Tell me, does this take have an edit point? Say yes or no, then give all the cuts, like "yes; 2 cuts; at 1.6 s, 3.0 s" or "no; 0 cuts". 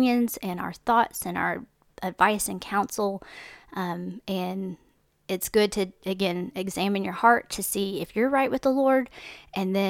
no; 0 cuts